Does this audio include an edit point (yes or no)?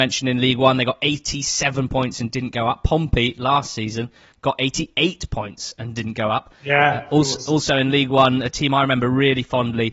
no